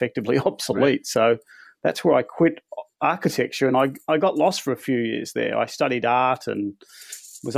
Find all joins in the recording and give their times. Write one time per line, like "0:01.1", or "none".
none